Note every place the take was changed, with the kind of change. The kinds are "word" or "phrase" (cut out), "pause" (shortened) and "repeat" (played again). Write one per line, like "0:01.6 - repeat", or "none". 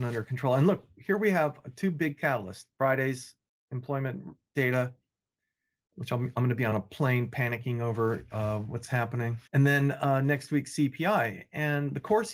0:09.5 - pause